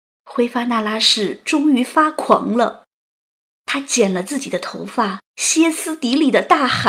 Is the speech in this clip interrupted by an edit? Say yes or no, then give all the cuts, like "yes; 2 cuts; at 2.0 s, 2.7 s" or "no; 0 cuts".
yes; 1 cut; at 5.3 s